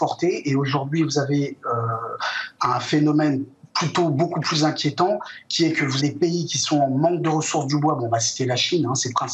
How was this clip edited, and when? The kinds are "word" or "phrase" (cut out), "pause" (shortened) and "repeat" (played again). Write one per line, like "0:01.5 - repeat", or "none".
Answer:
0:06.0 - word